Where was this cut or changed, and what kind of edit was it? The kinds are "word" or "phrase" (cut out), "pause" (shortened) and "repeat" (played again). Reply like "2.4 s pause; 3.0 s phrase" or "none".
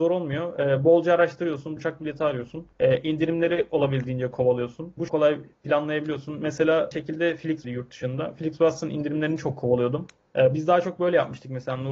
1.8 s word; 2.7 s pause; 5.1 s phrase; 5.5 s pause; 6.9 s word; 7.6 s phrase